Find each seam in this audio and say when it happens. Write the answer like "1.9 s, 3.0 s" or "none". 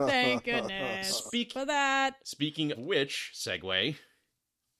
2.7 s